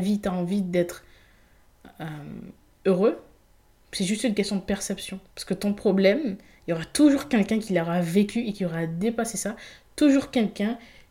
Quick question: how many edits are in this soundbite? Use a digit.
1